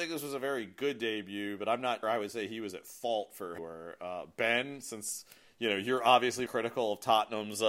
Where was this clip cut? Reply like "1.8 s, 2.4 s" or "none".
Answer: 2.0 s, 3.6 s, 6.5 s

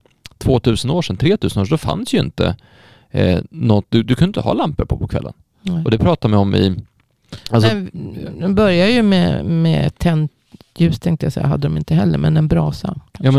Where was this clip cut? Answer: none

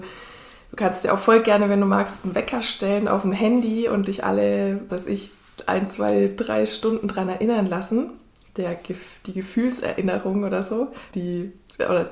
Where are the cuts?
4.9 s, 11.1 s

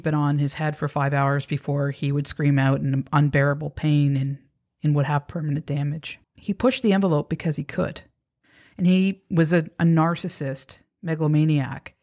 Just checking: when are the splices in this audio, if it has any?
6.2 s

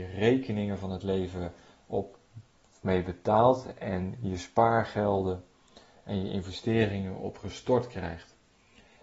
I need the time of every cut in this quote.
none

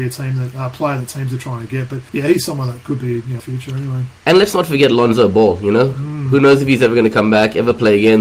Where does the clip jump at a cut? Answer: 2.1 s, 3.4 s, 4.2 s

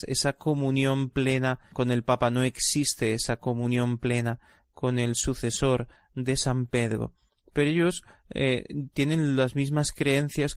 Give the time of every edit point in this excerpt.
none

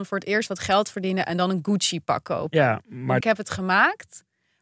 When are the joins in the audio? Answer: 3.2 s

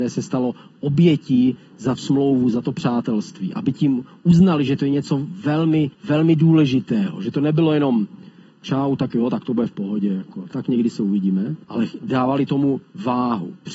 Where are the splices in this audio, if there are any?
2.0 s, 5.9 s, 11.6 s

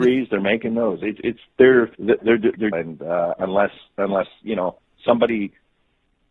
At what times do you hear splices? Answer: 1.2 s, 1.9 s, 2.7 s

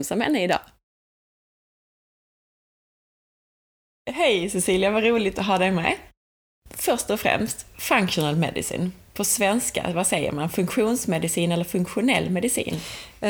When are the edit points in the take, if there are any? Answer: 6.4 s

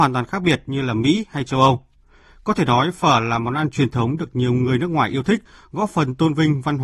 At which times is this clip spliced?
none

